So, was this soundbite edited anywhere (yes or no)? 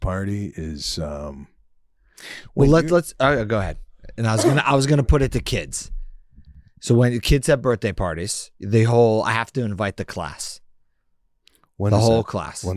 no